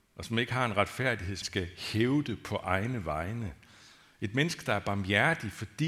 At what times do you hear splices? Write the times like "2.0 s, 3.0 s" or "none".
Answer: 1.4 s